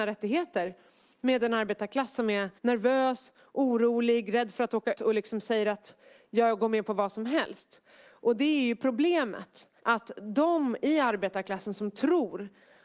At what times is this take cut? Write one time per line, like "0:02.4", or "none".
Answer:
0:02.6
0:04.9
0:09.8